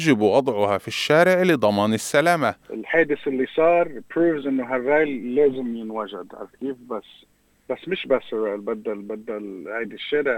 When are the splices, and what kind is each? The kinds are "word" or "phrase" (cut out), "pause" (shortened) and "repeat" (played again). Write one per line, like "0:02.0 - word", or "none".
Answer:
none